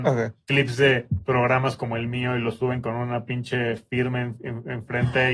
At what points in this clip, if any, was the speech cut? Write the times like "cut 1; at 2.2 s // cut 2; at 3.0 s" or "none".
none